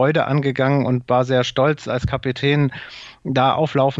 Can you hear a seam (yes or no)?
no